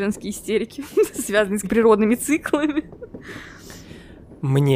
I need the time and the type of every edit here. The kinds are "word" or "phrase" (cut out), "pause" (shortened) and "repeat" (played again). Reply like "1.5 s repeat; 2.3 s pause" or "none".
1.6 s phrase